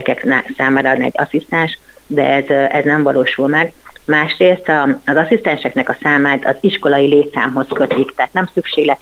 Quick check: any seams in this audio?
yes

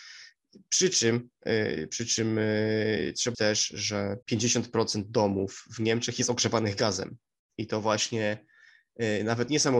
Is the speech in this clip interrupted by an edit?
yes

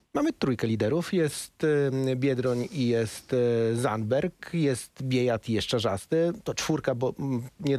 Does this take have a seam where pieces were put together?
no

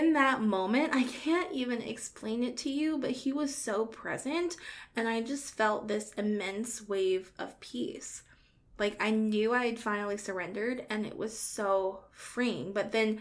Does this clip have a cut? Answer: no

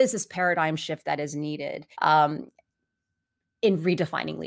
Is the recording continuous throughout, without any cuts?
no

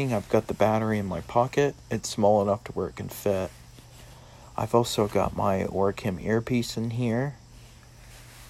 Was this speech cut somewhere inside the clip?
no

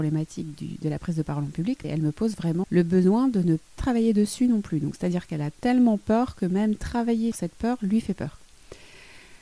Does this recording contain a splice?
yes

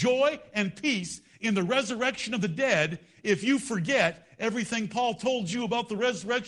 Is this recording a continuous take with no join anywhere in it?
yes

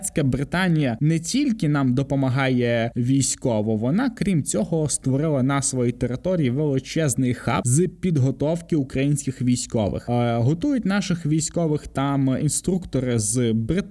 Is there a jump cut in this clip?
no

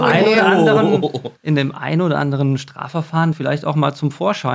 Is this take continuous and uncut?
no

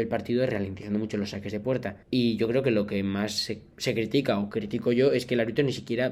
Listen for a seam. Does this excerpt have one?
yes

